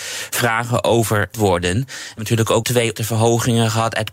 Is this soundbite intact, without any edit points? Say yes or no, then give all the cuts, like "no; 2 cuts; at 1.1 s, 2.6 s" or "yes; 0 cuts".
no; 4 cuts; at 1.3 s, 2.2 s, 2.6 s, 3.0 s